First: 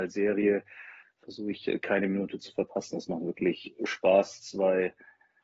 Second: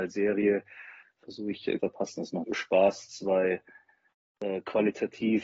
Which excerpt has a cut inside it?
second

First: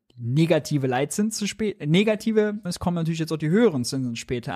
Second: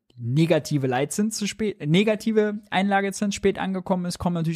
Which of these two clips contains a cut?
first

